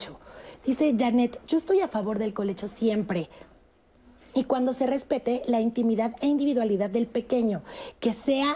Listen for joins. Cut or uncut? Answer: uncut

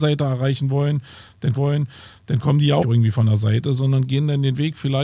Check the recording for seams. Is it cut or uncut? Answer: cut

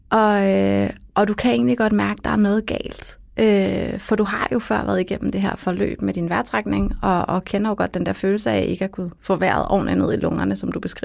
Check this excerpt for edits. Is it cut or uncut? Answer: cut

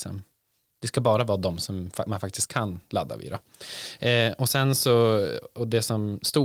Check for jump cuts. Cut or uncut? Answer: uncut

